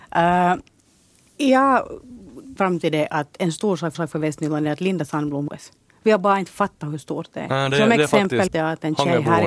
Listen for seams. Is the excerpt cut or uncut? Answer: cut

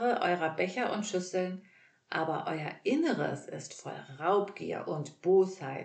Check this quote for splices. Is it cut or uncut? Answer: uncut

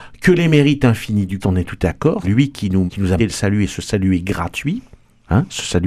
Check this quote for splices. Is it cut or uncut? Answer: cut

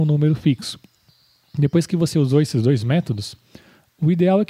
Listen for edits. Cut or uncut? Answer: uncut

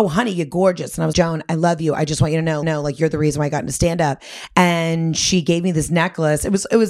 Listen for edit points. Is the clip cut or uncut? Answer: cut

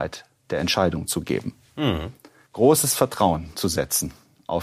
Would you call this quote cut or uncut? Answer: uncut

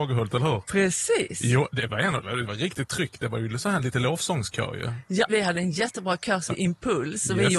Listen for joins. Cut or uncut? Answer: cut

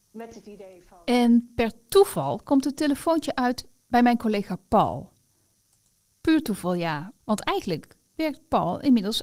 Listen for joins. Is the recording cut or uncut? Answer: uncut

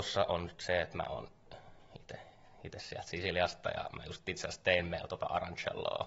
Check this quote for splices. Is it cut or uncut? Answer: uncut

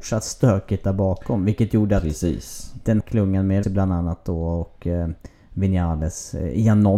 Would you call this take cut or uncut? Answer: cut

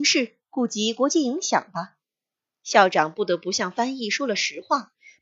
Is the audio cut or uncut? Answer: uncut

